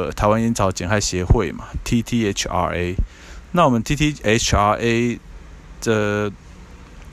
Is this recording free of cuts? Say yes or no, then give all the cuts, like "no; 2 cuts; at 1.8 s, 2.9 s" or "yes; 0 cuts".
yes; 0 cuts